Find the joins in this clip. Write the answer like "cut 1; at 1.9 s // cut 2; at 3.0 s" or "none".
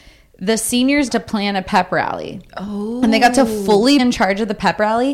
cut 1; at 1.1 s // cut 2; at 4.0 s